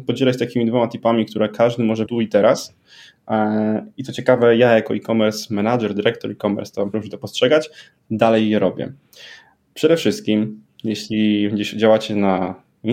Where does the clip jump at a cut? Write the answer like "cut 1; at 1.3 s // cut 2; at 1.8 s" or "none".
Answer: cut 1; at 2.1 s // cut 2; at 6.9 s